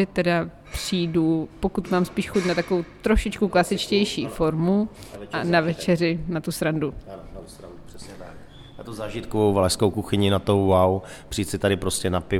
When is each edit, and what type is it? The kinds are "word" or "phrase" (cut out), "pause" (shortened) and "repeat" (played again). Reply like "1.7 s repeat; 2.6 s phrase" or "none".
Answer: none